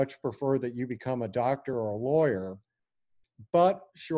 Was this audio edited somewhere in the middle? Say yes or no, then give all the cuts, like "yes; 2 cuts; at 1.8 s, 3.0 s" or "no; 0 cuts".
no; 0 cuts